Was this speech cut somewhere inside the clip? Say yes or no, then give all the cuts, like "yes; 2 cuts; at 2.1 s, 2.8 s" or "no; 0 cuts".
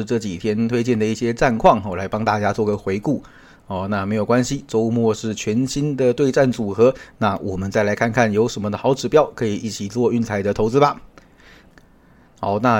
no; 0 cuts